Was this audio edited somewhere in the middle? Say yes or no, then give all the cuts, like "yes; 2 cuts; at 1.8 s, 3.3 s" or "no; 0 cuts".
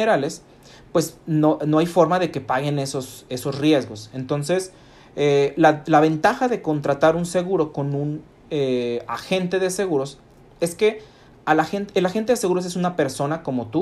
no; 0 cuts